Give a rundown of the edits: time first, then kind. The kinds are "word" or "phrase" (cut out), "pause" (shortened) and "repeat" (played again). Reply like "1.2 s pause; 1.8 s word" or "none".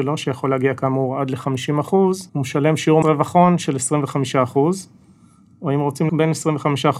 2.3 s pause; 3.0 s word; 6.1 s word